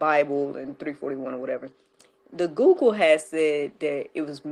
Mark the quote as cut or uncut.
uncut